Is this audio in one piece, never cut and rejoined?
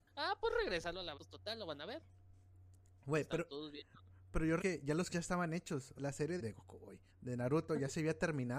no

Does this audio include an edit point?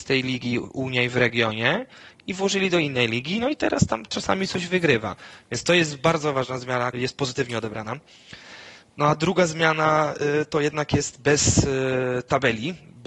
yes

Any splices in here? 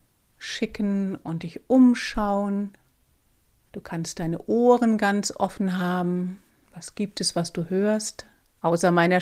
no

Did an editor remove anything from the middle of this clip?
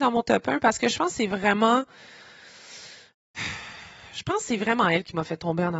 no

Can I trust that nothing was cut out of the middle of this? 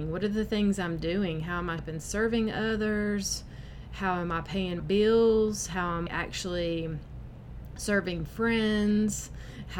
no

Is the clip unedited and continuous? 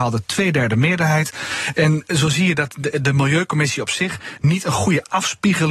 yes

